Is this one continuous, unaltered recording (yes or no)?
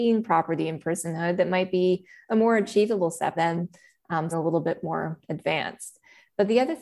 no